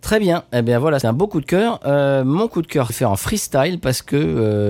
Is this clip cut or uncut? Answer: cut